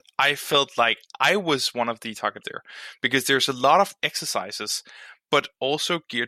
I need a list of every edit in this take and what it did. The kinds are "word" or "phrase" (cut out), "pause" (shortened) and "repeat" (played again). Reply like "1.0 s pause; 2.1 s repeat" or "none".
2.4 s word; 4.0 s word